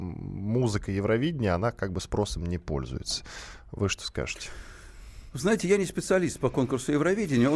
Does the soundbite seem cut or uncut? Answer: uncut